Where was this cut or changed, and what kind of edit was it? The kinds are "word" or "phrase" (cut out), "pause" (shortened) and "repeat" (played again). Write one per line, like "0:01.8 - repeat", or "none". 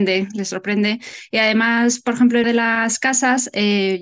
0:02.4 - word